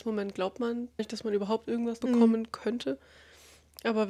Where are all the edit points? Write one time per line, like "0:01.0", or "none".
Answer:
0:01.0
0:02.0

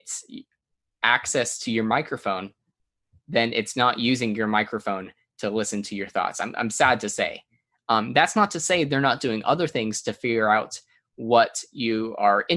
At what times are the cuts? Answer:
none

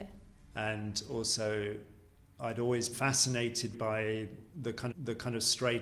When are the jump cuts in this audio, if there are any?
0:02.2
0:02.9
0:03.7
0:04.9

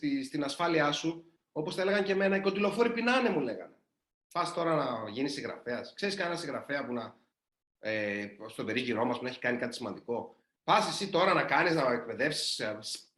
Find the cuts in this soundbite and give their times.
none

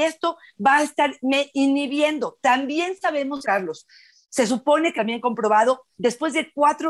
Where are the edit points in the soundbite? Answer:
0:03.4
0:04.9

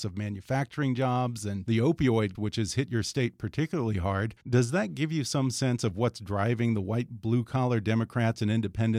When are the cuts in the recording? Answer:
0:02.3
0:04.4

